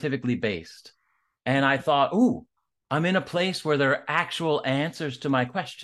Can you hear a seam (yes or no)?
no